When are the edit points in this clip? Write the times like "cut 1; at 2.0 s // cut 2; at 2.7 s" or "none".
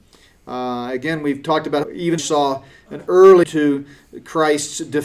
cut 1; at 1.8 s // cut 2; at 2.2 s // cut 3; at 3.4 s